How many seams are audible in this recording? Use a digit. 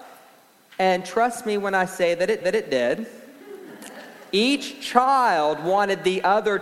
1